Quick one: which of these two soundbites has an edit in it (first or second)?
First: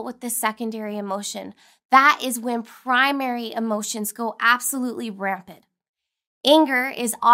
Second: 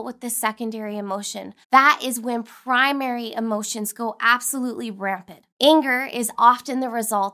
second